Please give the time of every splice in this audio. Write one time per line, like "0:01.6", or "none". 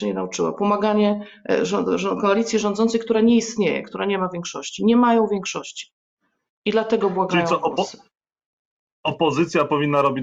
none